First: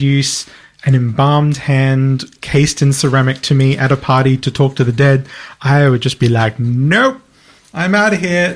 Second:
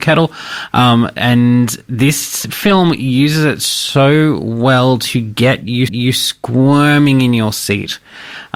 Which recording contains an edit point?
second; 1 cut; at 5.9 s

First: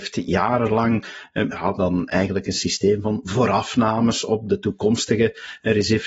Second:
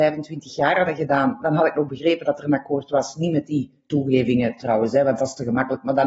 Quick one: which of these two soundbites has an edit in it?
first; 1 cut; at 1.5 s

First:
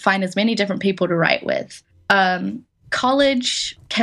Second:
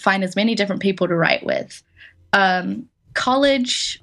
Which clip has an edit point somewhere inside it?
first; 1 cut; at 1.9 s

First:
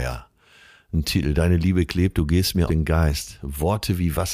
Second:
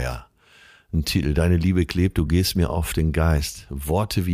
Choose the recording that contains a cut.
first; 1 cut; at 2.7 s

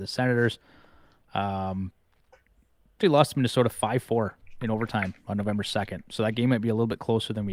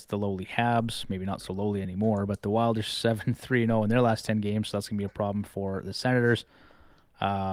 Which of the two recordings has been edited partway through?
first; 1 cut; at 3.0 s

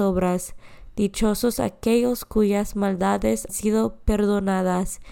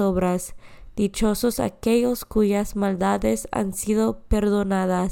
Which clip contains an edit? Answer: first; 1 cut; at 3.5 s

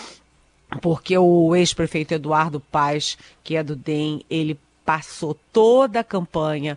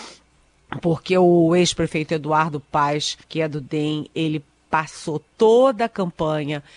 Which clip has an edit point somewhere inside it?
second; 1 cut; at 3.2 s

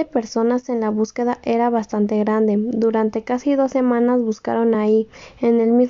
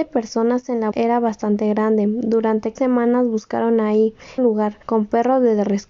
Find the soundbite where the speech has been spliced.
second; 4 cuts; at 0.9 s, 2.8 s, 4.4 s, 4.8 s

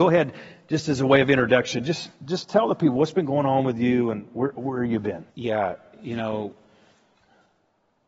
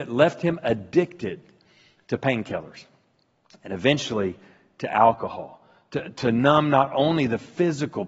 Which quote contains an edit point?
first; 1 cut; at 5.3 s

